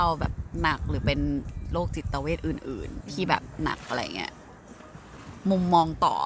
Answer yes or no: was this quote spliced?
yes